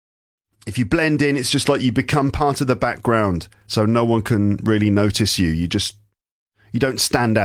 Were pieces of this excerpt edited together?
no; 0 cuts

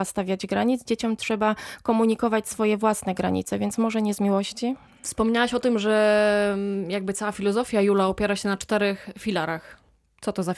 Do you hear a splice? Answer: no; 0 cuts

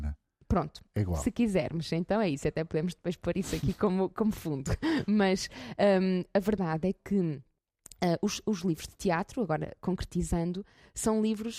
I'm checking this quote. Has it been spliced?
no; 0 cuts

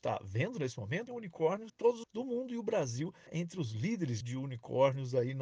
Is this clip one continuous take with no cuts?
no; 5 cuts; at 1.1 s, 1.7 s, 2.0 s, 3.3 s, 4.2 s

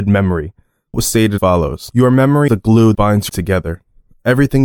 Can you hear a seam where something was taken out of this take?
yes; 5 cuts; at 0.9 s, 1.4 s, 2.5 s, 2.9 s, 3.3 s

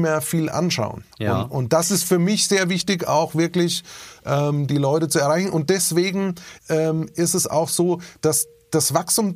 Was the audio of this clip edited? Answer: yes; 2 cuts; at 1.1 s, 6.6 s

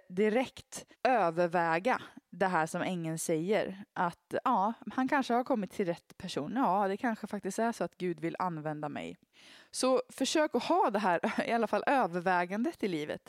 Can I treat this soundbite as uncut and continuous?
no; 3 cuts; at 0.9 s, 4.8 s, 9.3 s

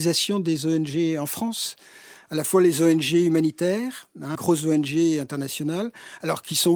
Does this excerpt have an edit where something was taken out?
yes; 1 cut; at 4.3 s

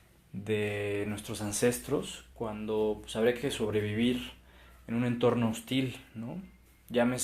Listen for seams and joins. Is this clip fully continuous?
yes; 0 cuts

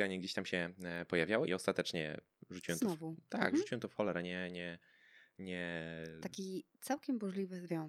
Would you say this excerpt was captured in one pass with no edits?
no; 1 cut; at 1.5 s

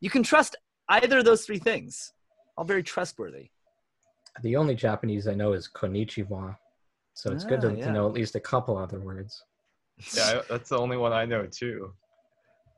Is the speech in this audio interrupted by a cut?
no; 0 cuts

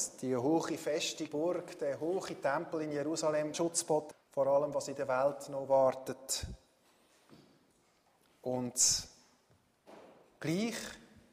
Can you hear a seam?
yes; 3 cuts; at 1.3 s, 3.5 s, 4.1 s

